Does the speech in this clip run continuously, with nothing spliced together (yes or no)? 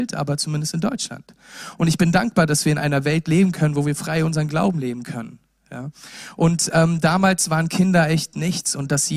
yes